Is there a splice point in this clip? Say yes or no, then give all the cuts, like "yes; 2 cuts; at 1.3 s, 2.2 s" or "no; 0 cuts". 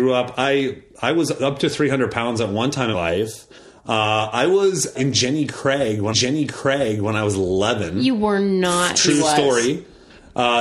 yes; 3 cuts; at 2.9 s, 4.9 s, 6.1 s